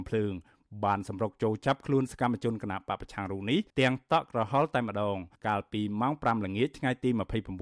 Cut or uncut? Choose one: cut